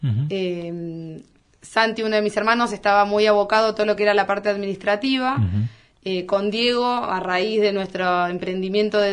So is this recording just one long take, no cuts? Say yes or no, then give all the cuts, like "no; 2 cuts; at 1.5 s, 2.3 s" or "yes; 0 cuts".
yes; 0 cuts